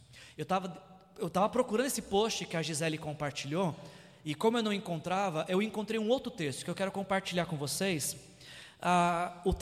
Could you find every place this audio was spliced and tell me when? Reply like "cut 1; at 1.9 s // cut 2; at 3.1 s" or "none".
none